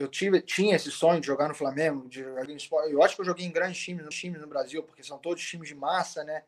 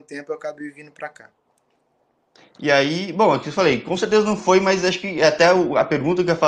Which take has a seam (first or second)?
first